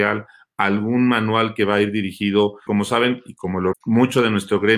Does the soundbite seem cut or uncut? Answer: cut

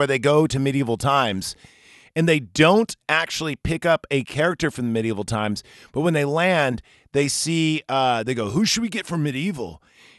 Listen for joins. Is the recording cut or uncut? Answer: uncut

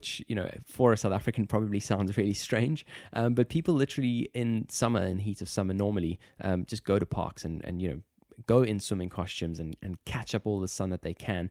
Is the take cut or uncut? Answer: uncut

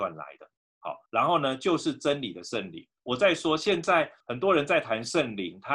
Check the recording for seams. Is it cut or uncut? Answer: cut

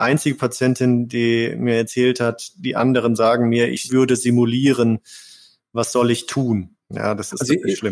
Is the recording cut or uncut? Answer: uncut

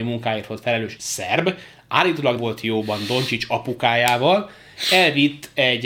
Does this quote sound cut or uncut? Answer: cut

